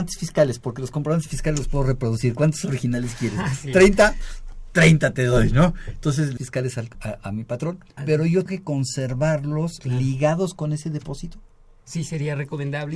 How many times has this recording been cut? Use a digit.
4